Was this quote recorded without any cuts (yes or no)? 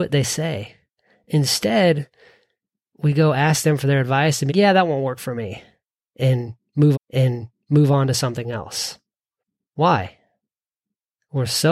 no